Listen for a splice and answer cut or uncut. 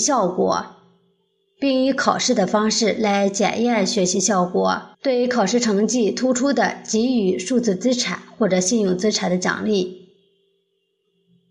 cut